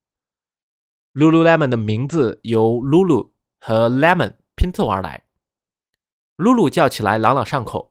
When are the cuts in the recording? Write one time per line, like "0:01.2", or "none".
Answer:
none